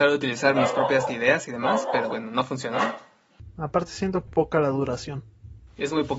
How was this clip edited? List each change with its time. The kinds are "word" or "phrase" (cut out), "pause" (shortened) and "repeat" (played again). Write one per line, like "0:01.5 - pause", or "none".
0:01.1 - word
0:02.1 - word
0:04.3 - phrase